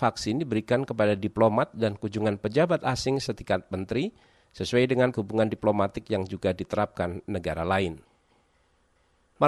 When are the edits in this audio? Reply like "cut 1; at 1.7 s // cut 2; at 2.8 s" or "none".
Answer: cut 1; at 5.1 s